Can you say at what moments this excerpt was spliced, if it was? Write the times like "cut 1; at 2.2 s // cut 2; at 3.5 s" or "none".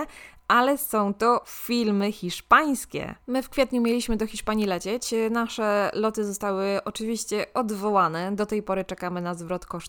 cut 1; at 3.2 s